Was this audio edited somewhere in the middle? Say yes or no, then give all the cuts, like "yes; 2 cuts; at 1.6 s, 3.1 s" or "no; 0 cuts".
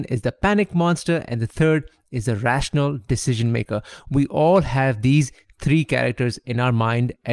no; 0 cuts